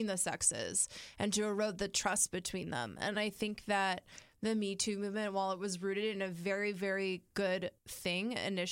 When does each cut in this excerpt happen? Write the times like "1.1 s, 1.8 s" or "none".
7.8 s

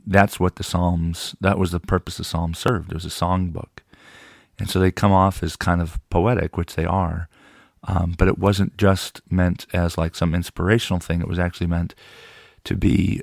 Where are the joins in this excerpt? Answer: none

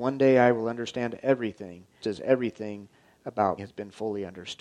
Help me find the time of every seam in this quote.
2.0 s, 3.6 s

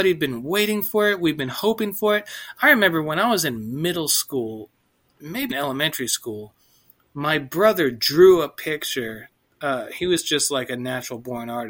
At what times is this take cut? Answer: 5.5 s

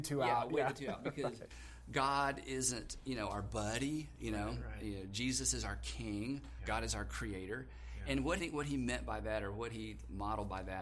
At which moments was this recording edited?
8.4 s

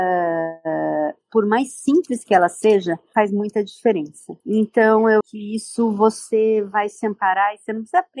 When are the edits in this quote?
4.4 s, 5.2 s

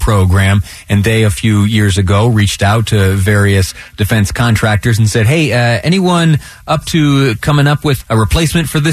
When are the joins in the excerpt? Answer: 8.0 s

